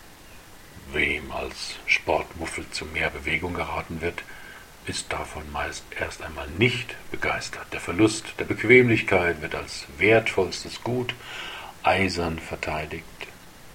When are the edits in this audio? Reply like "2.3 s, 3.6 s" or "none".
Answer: none